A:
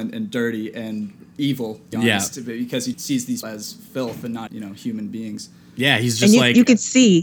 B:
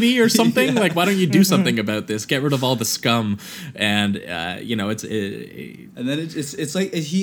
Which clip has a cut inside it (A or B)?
A